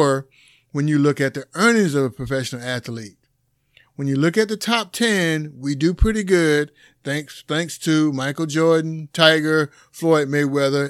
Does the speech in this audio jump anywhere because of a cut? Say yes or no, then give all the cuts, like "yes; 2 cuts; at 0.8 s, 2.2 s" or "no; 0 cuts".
no; 0 cuts